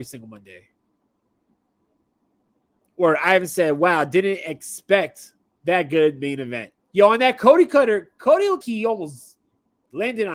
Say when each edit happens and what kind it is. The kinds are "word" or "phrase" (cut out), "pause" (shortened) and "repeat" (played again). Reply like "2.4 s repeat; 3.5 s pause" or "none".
6.8 s pause; 8.6 s word

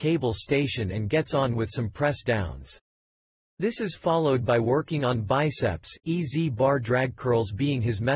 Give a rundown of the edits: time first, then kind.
none

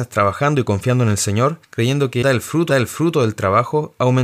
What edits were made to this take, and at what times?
2.2 s word; 2.7 s repeat

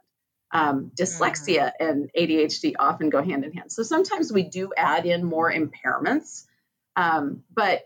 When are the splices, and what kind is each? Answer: none

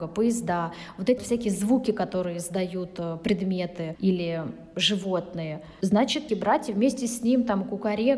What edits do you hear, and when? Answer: 1.2 s word; 6.3 s phrase

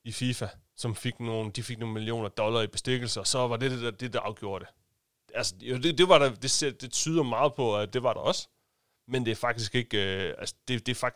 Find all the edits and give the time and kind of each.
none

